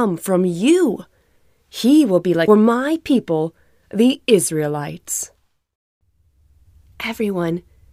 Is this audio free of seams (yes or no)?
no